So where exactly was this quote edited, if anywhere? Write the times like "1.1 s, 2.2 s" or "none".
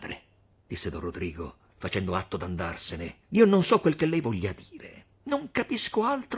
3.2 s, 5.1 s